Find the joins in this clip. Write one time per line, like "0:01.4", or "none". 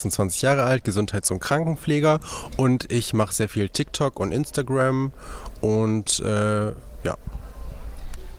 none